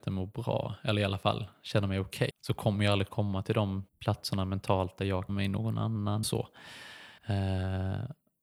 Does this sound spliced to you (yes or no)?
yes